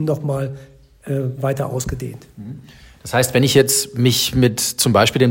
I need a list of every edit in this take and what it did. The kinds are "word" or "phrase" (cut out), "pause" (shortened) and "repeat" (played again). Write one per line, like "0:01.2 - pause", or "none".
none